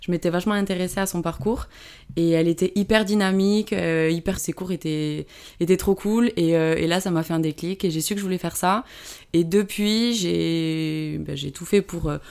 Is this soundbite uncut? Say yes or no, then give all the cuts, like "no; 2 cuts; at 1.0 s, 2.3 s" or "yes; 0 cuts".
no; 1 cut; at 4.4 s